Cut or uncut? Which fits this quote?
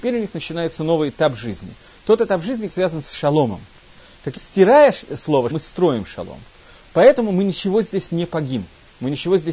cut